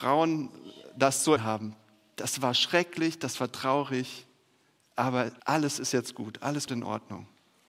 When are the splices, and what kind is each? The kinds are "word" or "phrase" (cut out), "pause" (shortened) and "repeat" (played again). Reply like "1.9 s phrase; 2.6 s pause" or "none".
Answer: 1.4 s word; 5.4 s pause; 6.7 s word